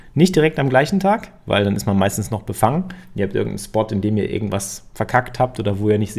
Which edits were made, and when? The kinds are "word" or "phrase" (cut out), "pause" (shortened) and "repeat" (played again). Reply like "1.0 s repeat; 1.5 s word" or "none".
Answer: none